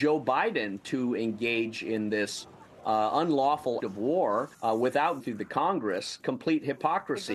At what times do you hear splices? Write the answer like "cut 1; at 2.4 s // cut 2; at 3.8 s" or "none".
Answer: cut 1; at 3.8 s // cut 2; at 4.5 s // cut 3; at 5.2 s // cut 4; at 6.2 s